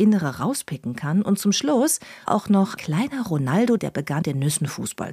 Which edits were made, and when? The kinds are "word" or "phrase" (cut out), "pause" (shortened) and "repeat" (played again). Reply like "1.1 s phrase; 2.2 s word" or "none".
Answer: 2.3 s word; 2.8 s word; 3.8 s word; 4.2 s word